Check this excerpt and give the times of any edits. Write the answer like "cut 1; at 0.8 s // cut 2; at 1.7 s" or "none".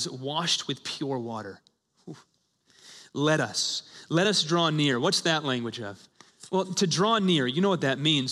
none